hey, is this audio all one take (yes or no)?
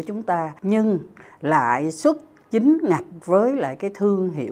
yes